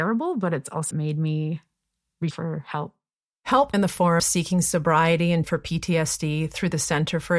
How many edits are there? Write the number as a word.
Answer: five